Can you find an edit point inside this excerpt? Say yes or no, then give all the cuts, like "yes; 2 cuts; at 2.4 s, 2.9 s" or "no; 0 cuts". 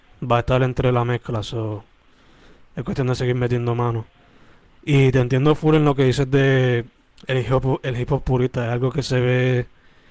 no; 0 cuts